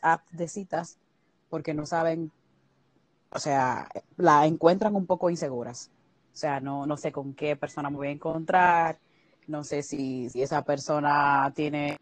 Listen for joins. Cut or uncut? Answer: uncut